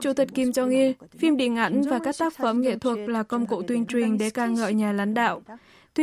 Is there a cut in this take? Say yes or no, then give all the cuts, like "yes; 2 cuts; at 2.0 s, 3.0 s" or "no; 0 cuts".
no; 0 cuts